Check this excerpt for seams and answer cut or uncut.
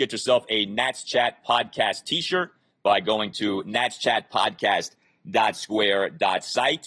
uncut